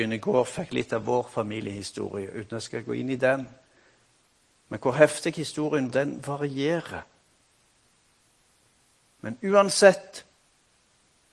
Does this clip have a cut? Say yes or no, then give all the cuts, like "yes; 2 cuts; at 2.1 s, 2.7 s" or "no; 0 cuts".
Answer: yes; 1 cut; at 5.9 s